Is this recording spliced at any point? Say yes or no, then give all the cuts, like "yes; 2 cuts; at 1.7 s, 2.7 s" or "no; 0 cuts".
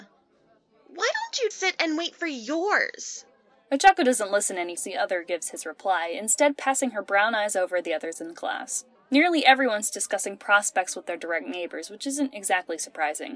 yes; 3 cuts; at 1.5 s, 4.8 s, 9.0 s